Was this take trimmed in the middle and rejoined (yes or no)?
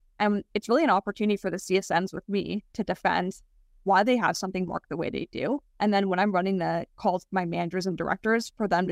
no